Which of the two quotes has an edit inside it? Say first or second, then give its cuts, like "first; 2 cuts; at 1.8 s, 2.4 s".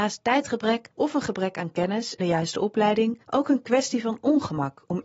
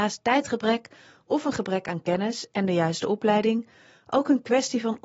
first; 3 cuts; at 0.9 s, 2.2 s, 3.2 s